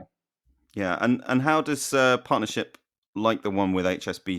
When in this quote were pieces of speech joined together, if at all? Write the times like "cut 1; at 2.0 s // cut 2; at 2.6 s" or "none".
none